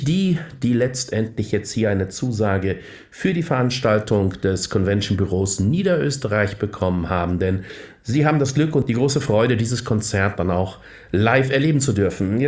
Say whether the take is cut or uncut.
uncut